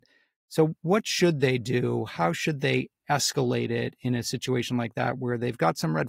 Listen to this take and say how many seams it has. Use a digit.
0